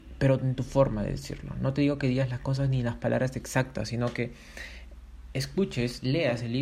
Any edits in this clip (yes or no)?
no